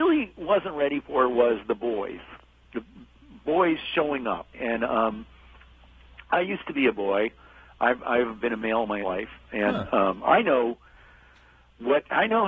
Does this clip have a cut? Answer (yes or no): yes